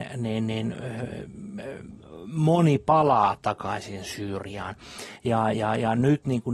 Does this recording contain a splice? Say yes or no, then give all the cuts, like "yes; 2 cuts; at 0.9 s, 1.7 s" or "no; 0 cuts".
no; 0 cuts